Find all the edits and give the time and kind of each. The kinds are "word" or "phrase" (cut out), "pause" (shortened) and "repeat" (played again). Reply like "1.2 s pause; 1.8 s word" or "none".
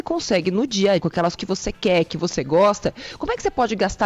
1.0 s word; 1.4 s word